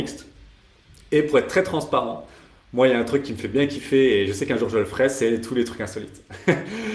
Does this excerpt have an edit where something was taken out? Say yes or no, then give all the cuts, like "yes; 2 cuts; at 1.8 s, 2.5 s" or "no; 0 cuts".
no; 0 cuts